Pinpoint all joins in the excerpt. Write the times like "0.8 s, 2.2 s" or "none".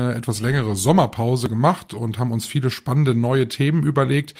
none